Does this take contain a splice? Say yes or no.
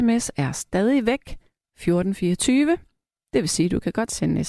no